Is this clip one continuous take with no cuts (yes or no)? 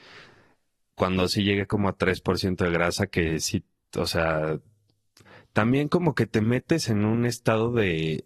yes